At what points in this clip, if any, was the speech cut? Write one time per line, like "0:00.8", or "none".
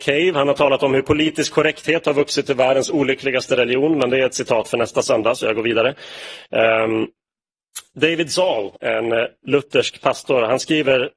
0:08.8

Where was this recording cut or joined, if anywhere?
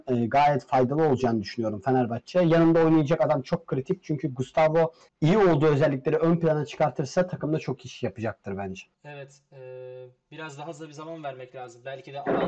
0:05.1
0:08.9

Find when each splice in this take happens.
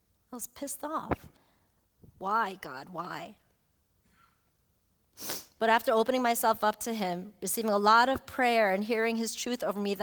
none

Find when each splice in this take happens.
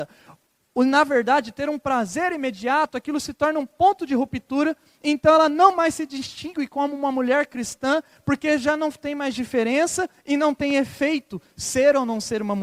none

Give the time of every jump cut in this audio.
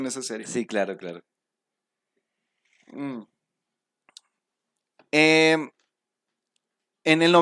none

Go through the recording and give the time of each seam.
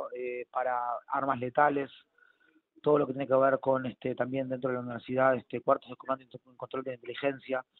none

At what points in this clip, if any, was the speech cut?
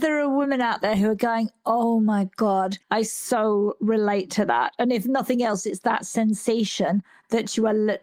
0:02.8

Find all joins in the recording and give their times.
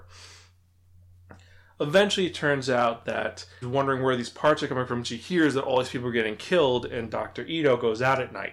0:03.6

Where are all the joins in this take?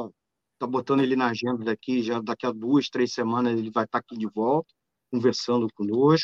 none

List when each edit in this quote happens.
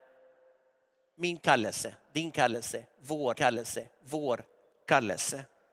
0:03.3

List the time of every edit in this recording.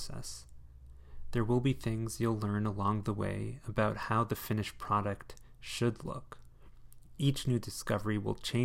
none

